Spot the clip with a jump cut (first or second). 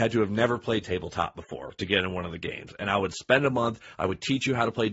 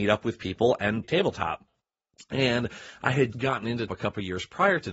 second